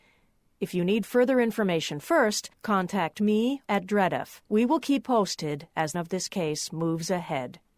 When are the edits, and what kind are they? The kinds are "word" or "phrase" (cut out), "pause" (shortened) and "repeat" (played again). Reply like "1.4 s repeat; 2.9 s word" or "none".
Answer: 2.5 s pause; 3.6 s phrase; 4.5 s pause; 5.0 s word; 5.9 s phrase